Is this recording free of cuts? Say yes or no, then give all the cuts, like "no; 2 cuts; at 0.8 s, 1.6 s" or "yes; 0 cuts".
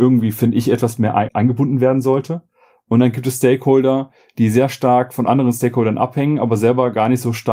no; 1 cut; at 1.3 s